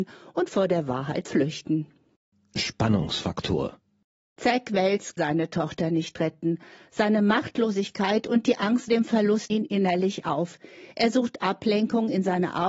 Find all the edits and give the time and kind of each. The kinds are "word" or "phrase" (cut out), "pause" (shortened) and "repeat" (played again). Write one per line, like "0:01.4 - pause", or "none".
0:01.2 - word
0:05.2 - word
0:08.9 - word
0:09.5 - word